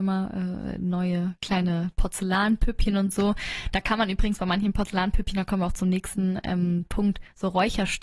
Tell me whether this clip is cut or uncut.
uncut